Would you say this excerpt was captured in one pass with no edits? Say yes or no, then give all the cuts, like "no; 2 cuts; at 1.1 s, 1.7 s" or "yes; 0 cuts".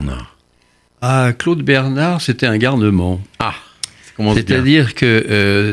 no; 1 cut; at 3.3 s